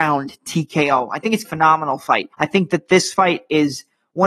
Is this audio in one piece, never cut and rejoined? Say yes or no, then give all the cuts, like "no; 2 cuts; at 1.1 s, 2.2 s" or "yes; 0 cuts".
no; 2 cuts; at 1.4 s, 2.3 s